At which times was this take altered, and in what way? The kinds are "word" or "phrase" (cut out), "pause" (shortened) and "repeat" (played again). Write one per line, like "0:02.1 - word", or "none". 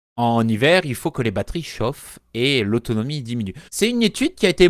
0:03.7 - pause